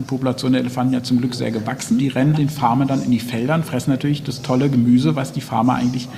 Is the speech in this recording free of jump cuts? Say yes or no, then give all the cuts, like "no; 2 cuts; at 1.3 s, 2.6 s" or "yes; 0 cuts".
no; 2 cuts; at 2.0 s, 2.3 s